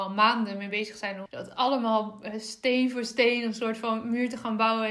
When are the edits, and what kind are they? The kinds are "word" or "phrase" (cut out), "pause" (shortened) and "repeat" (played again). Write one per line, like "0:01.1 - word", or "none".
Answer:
0:01.3 - word